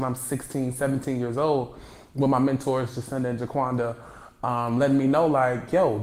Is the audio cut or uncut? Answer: uncut